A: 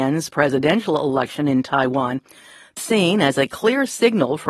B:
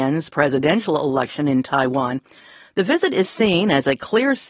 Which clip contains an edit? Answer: A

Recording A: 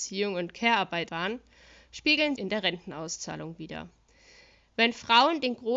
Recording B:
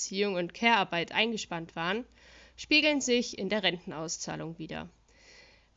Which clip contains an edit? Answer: A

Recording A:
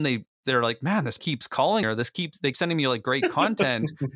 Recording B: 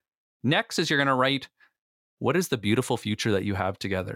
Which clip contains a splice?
A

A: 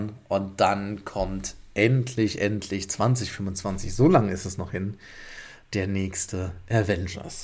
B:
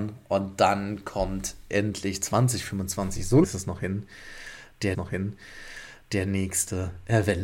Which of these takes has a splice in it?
B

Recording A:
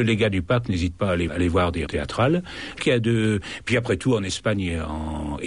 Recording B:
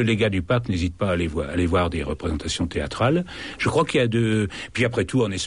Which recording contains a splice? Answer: A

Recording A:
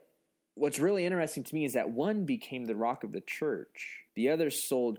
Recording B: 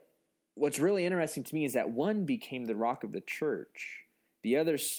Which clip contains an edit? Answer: A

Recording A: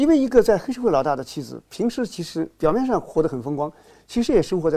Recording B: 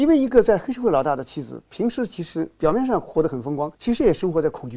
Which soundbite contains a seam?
B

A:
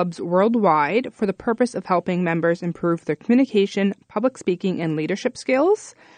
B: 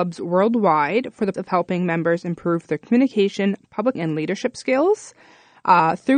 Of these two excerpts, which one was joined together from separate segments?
B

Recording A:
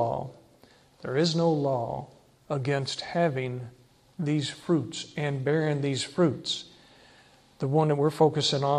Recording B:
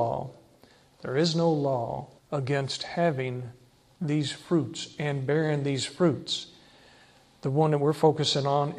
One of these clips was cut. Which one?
B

